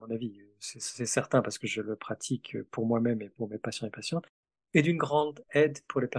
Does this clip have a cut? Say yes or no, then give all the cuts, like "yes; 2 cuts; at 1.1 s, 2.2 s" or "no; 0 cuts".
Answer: no; 0 cuts